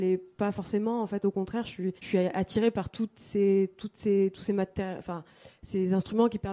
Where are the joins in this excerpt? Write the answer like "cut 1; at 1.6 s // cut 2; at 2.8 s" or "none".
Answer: cut 1; at 2.0 s

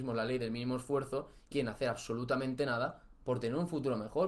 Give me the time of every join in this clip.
cut 1; at 1.5 s

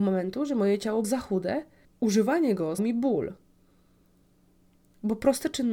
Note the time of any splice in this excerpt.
cut 1; at 1.0 s // cut 2; at 1.8 s // cut 3; at 2.8 s

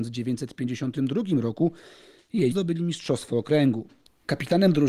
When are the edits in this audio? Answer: cut 1; at 2.5 s

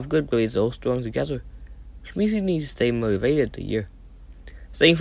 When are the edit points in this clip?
cut 1; at 3.5 s

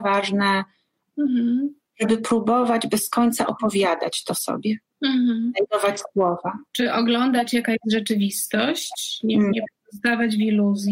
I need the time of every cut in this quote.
cut 1; at 4.8 s // cut 2; at 6.7 s

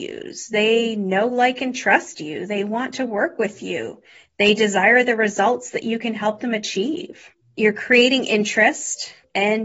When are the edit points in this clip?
none

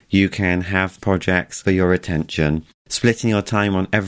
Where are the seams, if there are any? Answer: cut 1; at 1.0 s // cut 2; at 1.6 s

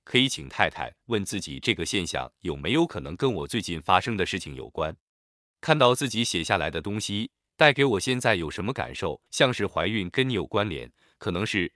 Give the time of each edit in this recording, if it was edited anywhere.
cut 1; at 9.3 s

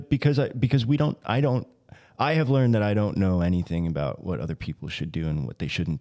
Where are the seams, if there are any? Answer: none

